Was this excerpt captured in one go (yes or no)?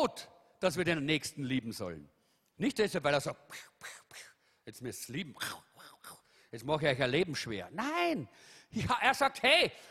yes